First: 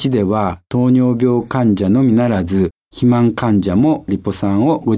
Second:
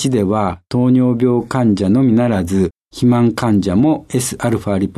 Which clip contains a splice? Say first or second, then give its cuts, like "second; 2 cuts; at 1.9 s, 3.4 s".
first; 1 cut; at 4.1 s